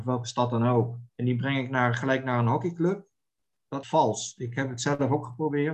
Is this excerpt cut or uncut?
cut